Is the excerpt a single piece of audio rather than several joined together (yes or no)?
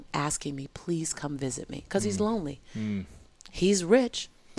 yes